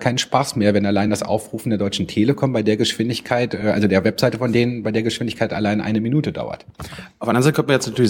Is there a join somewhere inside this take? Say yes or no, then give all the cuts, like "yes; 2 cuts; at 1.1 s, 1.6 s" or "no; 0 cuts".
no; 0 cuts